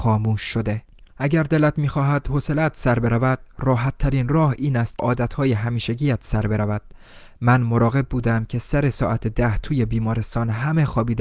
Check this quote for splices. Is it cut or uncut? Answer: cut